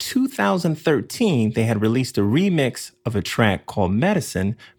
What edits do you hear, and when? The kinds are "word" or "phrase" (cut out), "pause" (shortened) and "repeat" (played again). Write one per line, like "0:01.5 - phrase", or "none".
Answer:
none